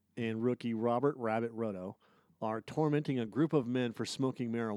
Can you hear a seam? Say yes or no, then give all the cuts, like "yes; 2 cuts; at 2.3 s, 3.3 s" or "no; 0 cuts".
no; 0 cuts